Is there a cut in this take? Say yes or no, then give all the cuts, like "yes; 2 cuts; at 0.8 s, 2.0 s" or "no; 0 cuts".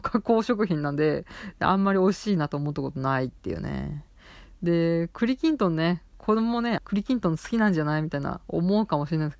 yes; 1 cut; at 6.8 s